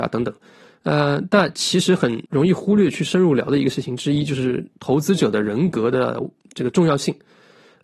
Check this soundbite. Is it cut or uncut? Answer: cut